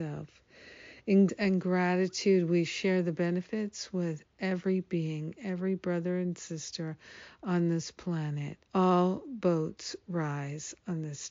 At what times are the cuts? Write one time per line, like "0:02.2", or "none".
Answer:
0:01.3
0:08.6